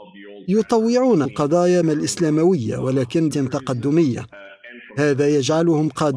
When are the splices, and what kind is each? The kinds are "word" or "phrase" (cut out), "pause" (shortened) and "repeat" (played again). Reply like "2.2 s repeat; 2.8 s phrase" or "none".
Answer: 1.2 s word; 1.8 s word; 3.3 s word